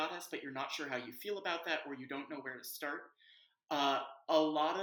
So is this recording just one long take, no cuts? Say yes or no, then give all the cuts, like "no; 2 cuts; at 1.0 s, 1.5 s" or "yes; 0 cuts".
yes; 0 cuts